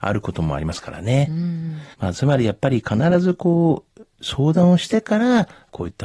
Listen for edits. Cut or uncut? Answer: cut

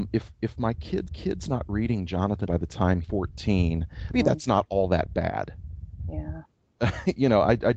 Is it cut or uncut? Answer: cut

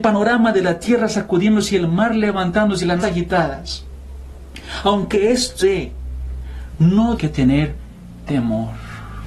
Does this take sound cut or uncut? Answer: cut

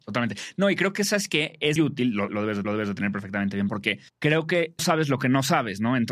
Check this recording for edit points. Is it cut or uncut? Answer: cut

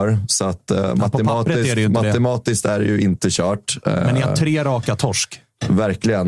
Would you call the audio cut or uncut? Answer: uncut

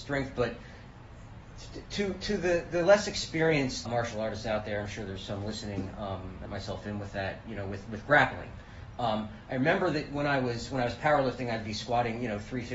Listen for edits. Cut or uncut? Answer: cut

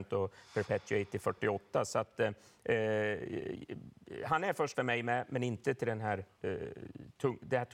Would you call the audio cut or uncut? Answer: cut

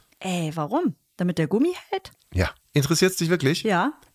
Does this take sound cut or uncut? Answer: cut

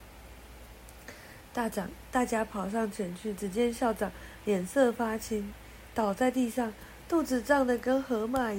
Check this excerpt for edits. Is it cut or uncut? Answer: uncut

